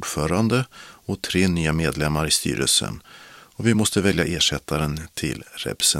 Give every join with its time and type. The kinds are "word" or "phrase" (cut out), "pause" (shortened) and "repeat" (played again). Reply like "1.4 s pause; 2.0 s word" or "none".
none